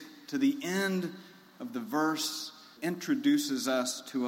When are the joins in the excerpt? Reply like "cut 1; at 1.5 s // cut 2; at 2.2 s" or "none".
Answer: cut 1; at 2.8 s